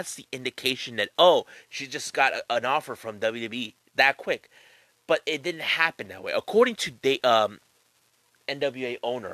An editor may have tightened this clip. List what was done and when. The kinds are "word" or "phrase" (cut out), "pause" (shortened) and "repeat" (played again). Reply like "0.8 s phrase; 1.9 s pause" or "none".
none